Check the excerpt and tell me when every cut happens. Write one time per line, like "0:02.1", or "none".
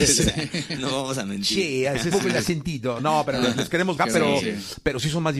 0:02.1
0:04.0